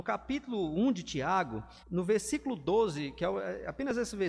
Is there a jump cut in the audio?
yes; 1 cut; at 1.8 s

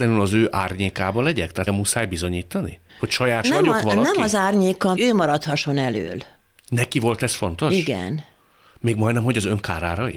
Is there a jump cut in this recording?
yes; 4 cuts; at 1.7 s, 2.9 s, 3.4 s, 5.0 s

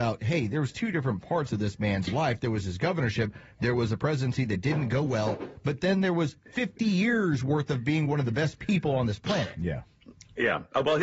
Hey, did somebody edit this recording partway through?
no; 0 cuts

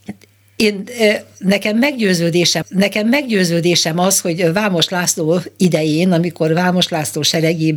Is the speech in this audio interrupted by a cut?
yes; 1 cut; at 2.6 s

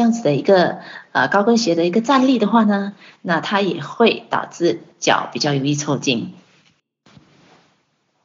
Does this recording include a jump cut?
no; 0 cuts

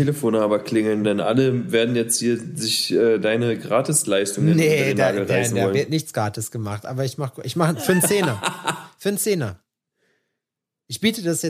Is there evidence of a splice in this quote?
no; 0 cuts

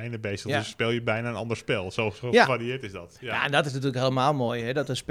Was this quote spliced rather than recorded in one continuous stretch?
no; 0 cuts

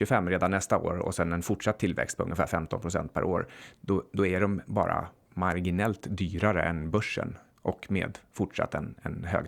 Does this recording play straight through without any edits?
yes; 0 cuts

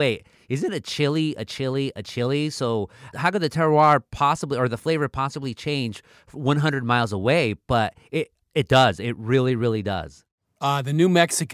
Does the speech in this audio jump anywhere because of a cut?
no; 0 cuts

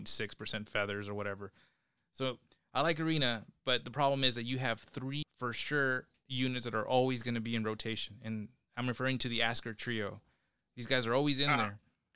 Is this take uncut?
yes; 0 cuts

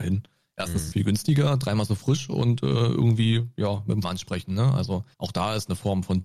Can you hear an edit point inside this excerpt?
yes; 3 cuts; at 0.9 s, 4.0 s, 5.1 s

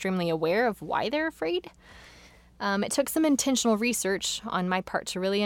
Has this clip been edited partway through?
no; 0 cuts

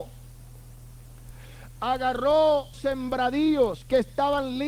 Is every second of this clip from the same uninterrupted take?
no; 1 cut; at 2.7 s

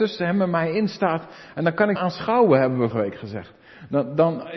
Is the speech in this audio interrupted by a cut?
yes; 2 cuts; at 2.0 s, 2.9 s

